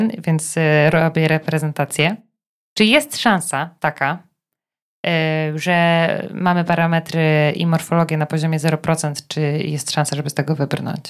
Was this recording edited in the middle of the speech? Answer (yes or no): no